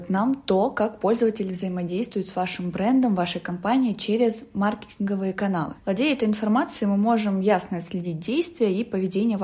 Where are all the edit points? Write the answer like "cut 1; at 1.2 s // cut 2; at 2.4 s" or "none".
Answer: cut 1; at 5.8 s